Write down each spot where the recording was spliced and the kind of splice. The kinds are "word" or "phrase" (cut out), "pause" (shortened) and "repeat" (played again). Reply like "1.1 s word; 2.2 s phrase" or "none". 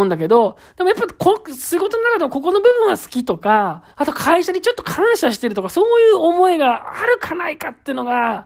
3.9 s pause